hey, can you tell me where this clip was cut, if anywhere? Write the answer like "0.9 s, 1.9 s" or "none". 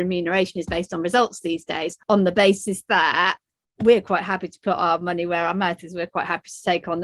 2.0 s, 3.5 s